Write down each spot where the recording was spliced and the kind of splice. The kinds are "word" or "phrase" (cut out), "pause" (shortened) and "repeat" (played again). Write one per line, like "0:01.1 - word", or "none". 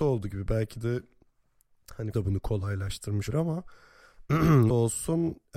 0:02.1 - word
0:03.3 - word
0:04.7 - word